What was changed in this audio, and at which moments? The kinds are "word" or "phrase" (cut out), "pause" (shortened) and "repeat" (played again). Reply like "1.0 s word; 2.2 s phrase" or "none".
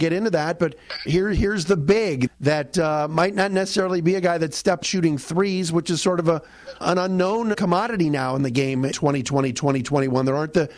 1.1 s word; 2.3 s word; 4.8 s word; 6.8 s word; 7.5 s word; 8.9 s word

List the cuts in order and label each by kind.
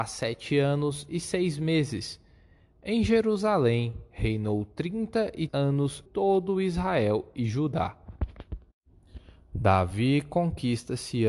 5.5 s word; 6.1 s word

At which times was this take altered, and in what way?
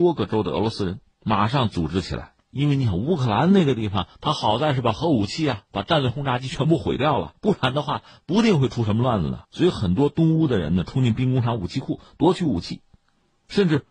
7.4 s pause; 9.4 s pause

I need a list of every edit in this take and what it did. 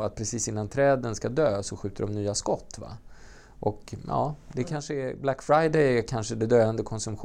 none

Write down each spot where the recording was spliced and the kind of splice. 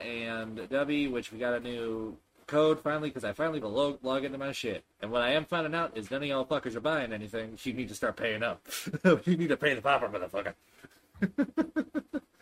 3.6 s phrase; 4.9 s pause; 7.6 s word

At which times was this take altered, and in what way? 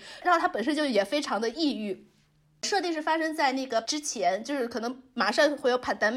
3.8 s word

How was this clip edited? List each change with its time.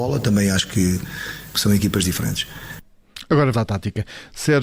1.5 s word; 3.5 s word

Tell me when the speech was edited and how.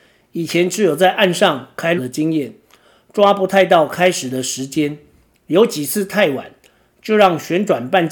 2.0 s word

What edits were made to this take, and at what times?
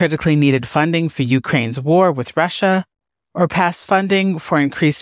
none

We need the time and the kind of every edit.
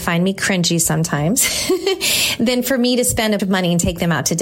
3.4 s word

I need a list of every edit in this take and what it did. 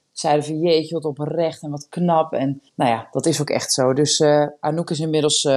2.7 s pause

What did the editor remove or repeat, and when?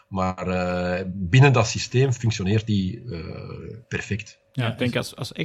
3.8 s pause

